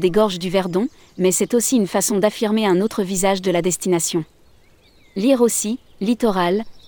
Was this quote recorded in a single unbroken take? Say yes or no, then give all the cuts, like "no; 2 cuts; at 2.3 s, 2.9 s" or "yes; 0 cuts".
yes; 0 cuts